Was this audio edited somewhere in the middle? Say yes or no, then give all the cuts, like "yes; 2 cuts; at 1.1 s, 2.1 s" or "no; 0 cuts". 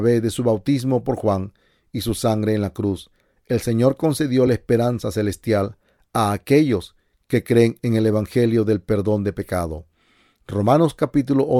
no; 0 cuts